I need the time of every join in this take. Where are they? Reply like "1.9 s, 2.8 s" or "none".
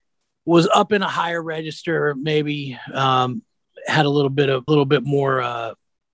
4.7 s